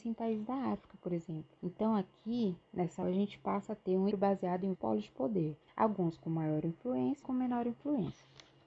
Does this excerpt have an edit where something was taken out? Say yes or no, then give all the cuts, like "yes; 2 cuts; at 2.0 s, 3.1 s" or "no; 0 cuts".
yes; 6 cuts; at 1.6 s, 3.0 s, 4.1 s, 4.7 s, 5.6 s, 7.2 s